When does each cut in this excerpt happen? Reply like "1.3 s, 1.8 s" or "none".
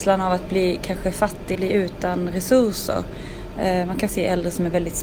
1.5 s, 4.1 s